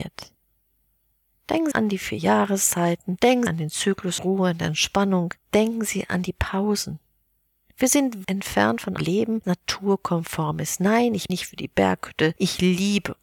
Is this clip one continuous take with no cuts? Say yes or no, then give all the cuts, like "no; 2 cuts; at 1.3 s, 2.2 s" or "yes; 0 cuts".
no; 7 cuts; at 1.7 s, 3.5 s, 4.2 s, 8.2 s, 9.0 s, 9.4 s, 11.3 s